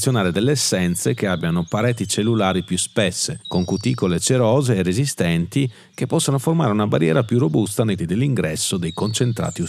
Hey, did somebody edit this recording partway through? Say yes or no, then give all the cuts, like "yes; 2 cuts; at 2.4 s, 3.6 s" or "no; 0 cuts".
yes; 2 cuts; at 3.4 s, 8.0 s